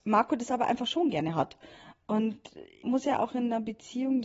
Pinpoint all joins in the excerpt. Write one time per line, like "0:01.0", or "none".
0:02.8